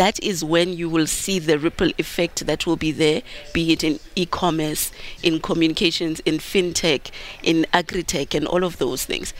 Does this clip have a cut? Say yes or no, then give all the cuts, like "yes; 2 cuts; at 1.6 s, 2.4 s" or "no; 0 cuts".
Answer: no; 0 cuts